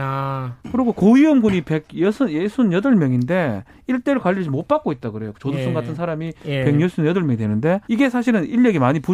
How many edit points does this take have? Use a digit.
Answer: 1